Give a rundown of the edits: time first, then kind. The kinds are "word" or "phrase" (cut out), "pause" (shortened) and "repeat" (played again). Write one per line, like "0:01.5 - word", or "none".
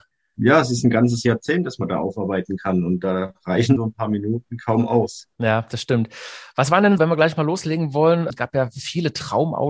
0:03.8 - word
0:05.3 - pause
0:07.0 - word